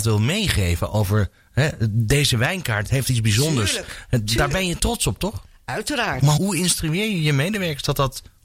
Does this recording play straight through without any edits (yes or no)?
no